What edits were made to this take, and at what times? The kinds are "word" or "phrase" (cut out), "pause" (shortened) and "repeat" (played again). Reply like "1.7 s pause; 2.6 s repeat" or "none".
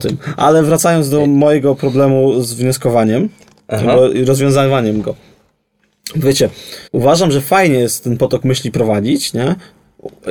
6.9 s pause

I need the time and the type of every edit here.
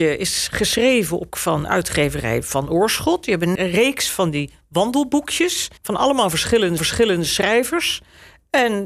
1.3 s word; 3.6 s word; 5.8 s pause; 6.8 s repeat

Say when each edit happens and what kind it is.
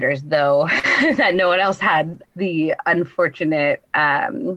1.8 s word; 2.2 s word

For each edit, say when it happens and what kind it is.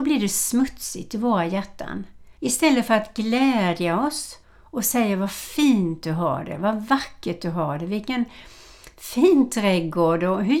2.3 s pause; 4.4 s pause

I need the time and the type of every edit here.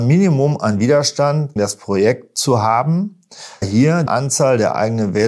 1.6 s word; 3.6 s word; 4.1 s word

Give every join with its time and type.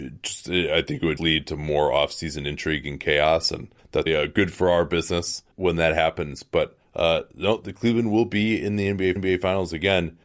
1.2 s word; 4.1 s word; 5.5 s word; 9.2 s repeat

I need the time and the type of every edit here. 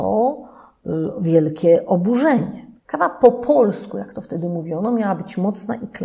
2.8 s pause

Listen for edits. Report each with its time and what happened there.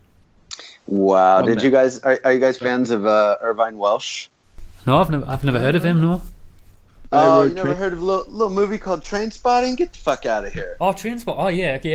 none

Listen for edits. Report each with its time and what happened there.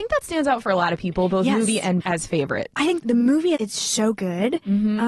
2.0 s word; 3.0 s word; 3.5 s word

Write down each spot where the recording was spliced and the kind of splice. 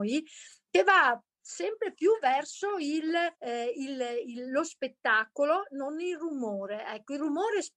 3.3 s pause

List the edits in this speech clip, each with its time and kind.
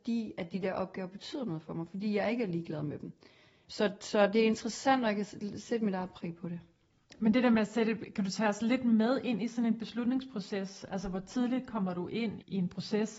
none

